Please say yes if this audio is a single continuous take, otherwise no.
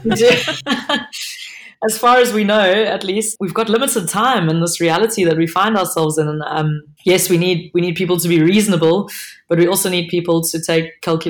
no